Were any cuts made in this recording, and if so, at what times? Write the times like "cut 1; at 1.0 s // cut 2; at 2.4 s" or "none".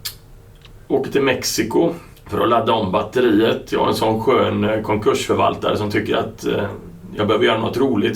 cut 1; at 2.1 s

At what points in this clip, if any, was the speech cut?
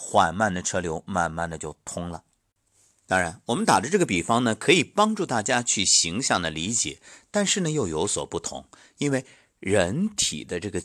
none

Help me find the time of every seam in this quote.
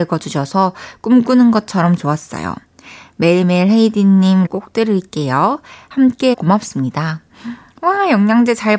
cut 1; at 4.5 s // cut 2; at 6.3 s

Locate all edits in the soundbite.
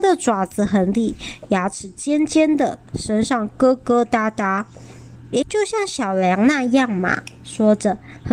cut 1; at 5.4 s

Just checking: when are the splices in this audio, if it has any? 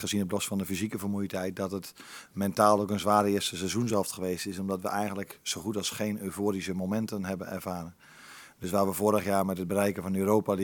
none

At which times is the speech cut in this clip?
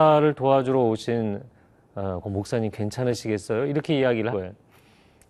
cut 1; at 2.2 s // cut 2; at 4.3 s

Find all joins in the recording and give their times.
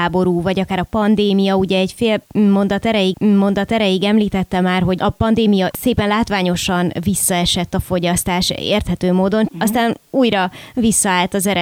cut 1; at 3.1 s // cut 2; at 5.7 s // cut 3; at 9.5 s

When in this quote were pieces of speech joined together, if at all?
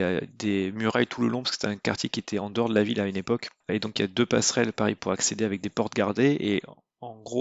cut 1; at 3.6 s

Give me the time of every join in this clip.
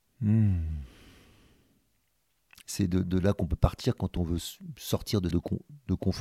cut 1; at 5.3 s

